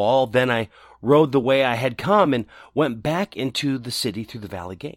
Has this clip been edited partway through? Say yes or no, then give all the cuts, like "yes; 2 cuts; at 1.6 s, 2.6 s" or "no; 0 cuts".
no; 0 cuts